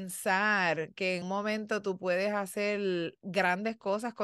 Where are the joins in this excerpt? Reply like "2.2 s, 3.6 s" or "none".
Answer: 1.2 s